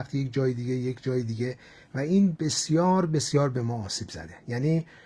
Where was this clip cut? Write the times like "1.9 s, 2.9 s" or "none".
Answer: none

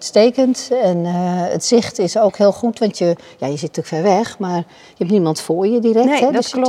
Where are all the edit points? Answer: none

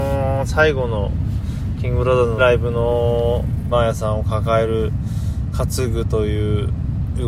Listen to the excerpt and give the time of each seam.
2.4 s, 3.7 s

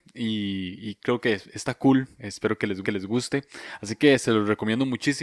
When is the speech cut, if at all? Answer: 2.8 s

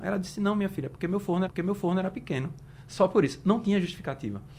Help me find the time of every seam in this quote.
1.4 s

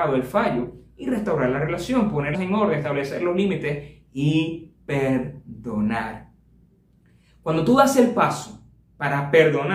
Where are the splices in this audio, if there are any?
2.3 s, 4.8 s

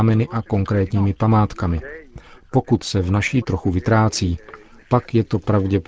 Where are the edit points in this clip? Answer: 3.4 s

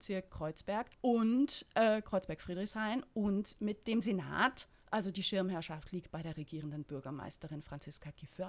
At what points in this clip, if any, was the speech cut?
0.9 s

